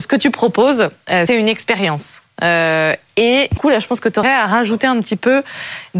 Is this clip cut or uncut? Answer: cut